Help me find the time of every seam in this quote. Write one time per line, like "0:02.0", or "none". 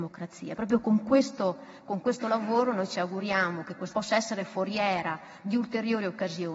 0:03.9